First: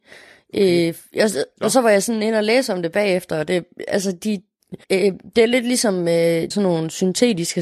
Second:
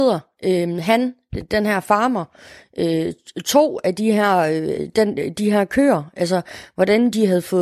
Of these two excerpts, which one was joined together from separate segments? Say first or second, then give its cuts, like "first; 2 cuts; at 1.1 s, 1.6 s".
first; 2 cuts; at 4.8 s, 6.5 s